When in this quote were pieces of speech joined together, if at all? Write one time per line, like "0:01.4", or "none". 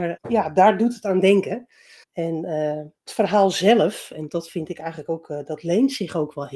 0:02.0
0:03.0
0:04.3